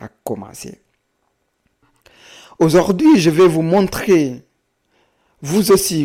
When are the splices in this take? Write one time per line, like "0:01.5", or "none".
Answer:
none

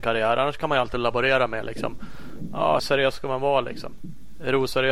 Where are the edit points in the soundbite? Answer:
0:02.8

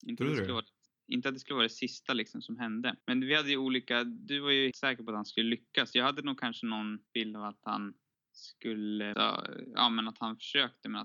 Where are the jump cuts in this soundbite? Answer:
0:03.0
0:04.7
0:07.1
0:09.1

